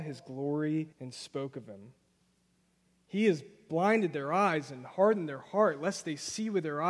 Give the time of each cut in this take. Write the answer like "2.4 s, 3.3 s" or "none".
0.9 s